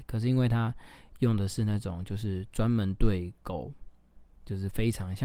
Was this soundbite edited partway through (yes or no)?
no